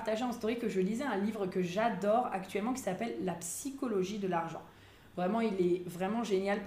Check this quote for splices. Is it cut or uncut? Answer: uncut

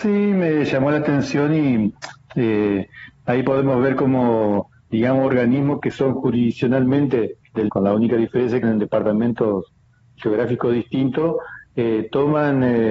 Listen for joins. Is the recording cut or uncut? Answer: cut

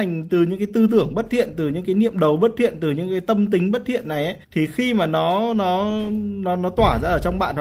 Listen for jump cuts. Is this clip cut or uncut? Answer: cut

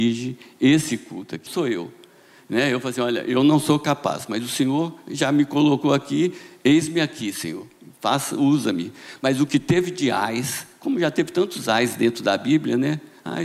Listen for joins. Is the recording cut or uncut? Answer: cut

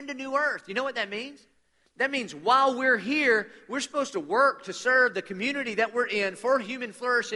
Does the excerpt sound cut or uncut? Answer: uncut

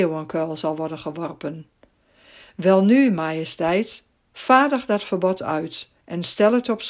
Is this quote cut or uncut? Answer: uncut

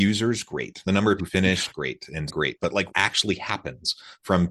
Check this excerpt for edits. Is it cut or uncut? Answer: cut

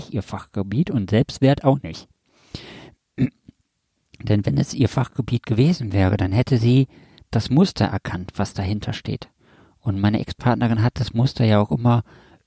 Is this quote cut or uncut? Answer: uncut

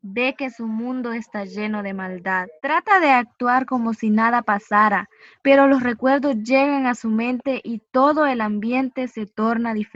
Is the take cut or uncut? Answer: cut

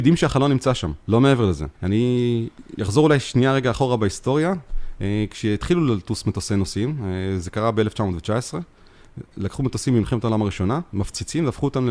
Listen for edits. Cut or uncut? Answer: cut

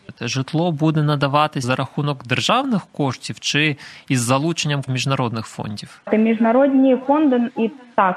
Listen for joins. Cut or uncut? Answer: cut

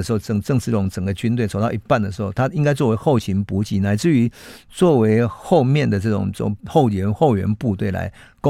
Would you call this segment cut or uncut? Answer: cut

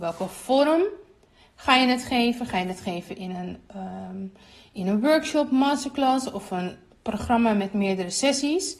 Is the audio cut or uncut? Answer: uncut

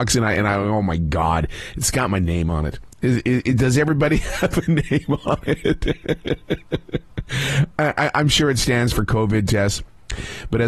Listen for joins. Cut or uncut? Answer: uncut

